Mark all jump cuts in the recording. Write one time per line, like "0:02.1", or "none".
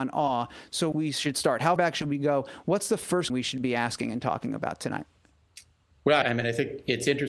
0:00.9
0:01.8
0:03.3
0:06.2